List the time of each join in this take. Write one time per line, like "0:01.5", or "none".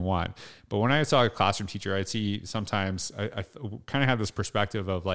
none